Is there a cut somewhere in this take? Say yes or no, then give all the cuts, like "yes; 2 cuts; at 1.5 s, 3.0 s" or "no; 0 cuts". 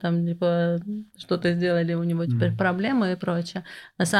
yes; 1 cut; at 1.1 s